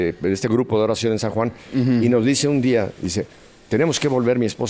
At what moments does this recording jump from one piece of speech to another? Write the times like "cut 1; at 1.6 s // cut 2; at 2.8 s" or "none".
none